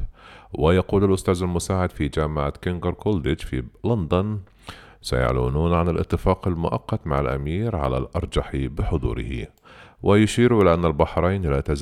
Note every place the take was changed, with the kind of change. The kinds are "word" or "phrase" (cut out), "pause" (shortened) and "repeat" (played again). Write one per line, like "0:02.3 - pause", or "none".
none